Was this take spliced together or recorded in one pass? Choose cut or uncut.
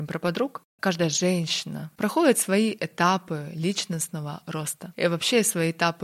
uncut